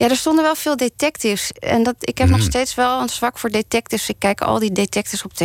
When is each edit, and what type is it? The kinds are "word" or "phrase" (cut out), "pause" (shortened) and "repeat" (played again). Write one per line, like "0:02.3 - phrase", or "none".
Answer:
none